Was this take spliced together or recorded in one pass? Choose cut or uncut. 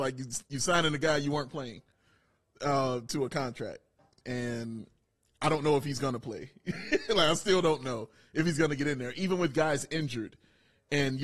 uncut